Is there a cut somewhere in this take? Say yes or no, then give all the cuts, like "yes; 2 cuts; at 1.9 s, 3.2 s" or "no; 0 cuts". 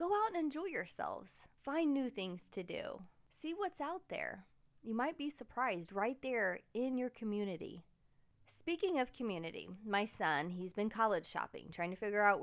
no; 0 cuts